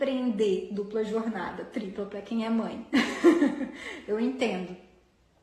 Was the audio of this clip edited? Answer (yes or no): no